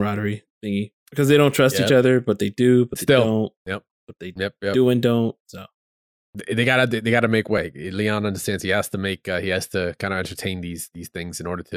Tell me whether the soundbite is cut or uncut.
cut